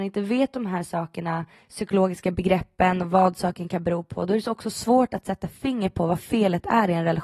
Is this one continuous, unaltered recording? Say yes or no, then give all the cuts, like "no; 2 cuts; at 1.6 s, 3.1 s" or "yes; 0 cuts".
yes; 0 cuts